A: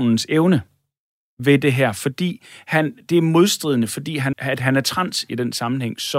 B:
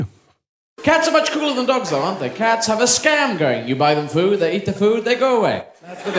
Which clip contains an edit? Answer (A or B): A